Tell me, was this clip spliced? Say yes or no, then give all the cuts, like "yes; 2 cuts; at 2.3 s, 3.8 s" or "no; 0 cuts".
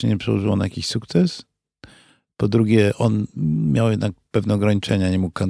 no; 0 cuts